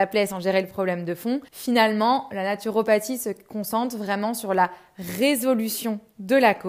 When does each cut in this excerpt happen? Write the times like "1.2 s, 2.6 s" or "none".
1.5 s

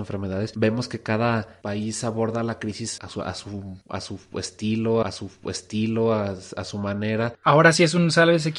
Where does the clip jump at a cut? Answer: 3.0 s, 3.8 s, 5.0 s

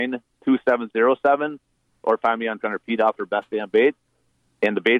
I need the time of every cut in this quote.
2.6 s

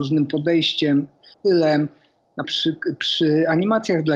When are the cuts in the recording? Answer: 1.3 s, 2.4 s

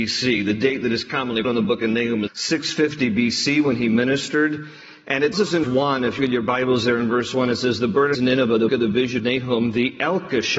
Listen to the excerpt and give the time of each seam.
1.4 s, 2.3 s, 5.3 s, 5.6 s, 6.2 s, 8.1 s, 8.7 s, 9.2 s

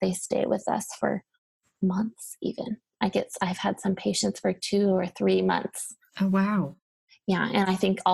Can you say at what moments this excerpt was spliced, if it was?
none

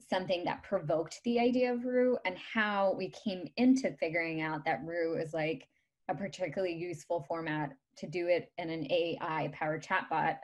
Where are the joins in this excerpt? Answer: none

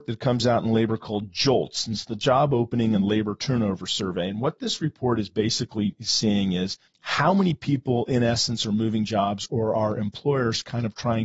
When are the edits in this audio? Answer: 6.9 s

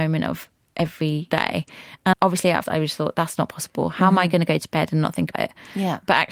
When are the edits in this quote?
1.3 s, 2.1 s, 2.6 s, 5.3 s

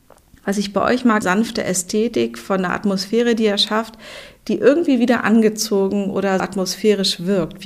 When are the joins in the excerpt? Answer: 1.2 s, 6.4 s

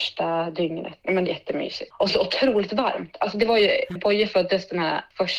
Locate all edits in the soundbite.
1.3 s, 2.1 s, 4.0 s

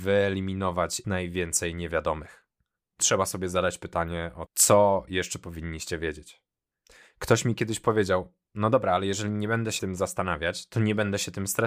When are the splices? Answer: 1.0 s, 3.0 s, 4.5 s, 9.8 s

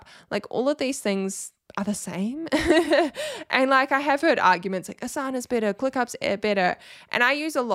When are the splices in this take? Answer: none

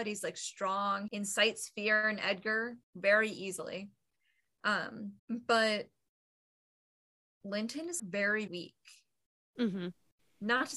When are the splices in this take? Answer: 1.1 s, 2.8 s, 5.2 s, 8.0 s, 8.5 s

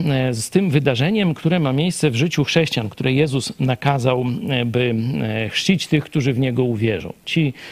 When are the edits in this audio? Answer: none

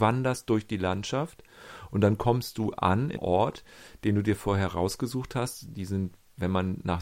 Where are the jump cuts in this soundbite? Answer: 3.2 s

